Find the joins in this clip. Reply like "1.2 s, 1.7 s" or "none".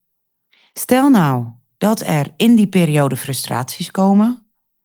none

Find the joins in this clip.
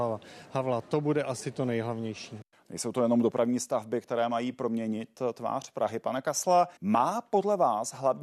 2.5 s, 6.8 s

